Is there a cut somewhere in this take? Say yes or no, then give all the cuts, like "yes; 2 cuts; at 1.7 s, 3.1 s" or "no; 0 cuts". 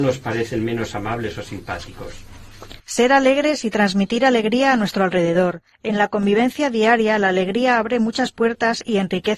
yes; 2 cuts; at 2.8 s, 5.7 s